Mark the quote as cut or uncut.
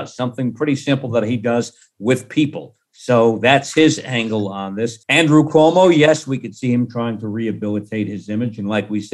cut